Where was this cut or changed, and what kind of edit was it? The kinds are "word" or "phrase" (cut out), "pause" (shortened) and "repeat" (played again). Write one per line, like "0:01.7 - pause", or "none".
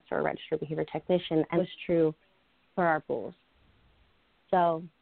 0:01.6 - phrase
0:03.0 - word